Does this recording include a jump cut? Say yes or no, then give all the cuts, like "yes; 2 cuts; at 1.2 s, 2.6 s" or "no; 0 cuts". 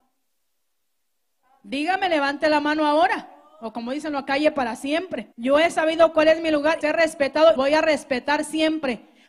yes; 3 cuts; at 5.3 s, 6.8 s, 7.6 s